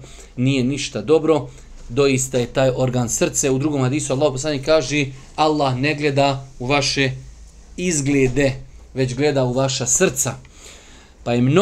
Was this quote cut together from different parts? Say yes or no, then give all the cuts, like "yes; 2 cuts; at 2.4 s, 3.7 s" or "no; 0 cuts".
no; 0 cuts